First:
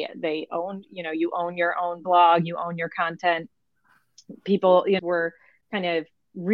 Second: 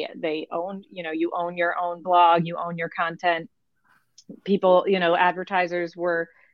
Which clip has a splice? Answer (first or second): first